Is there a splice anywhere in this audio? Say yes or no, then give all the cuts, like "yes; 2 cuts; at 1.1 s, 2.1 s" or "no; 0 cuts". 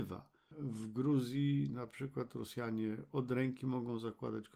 no; 0 cuts